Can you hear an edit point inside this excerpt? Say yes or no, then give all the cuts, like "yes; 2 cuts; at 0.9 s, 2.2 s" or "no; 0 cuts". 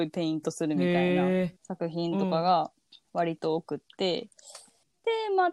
yes; 2 cuts; at 1.6 s, 2.9 s